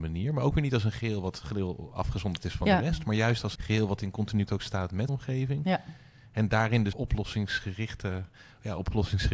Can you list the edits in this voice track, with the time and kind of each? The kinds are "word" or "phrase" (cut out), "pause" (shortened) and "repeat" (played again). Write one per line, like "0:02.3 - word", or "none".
0:03.5 - word
0:04.5 - word
0:05.1 - word
0:06.9 - word